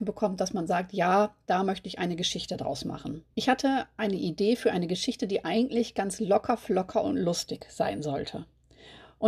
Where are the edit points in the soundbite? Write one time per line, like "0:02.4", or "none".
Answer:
0:03.3